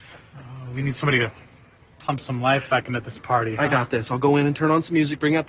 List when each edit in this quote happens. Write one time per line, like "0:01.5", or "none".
none